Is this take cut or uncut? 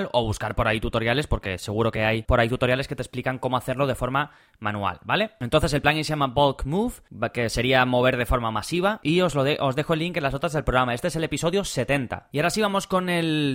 uncut